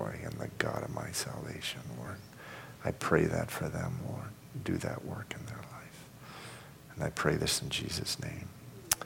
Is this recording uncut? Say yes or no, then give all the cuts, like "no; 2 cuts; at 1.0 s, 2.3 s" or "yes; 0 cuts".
yes; 0 cuts